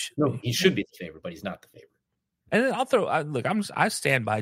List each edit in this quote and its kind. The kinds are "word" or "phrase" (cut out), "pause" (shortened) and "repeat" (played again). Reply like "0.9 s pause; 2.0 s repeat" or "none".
none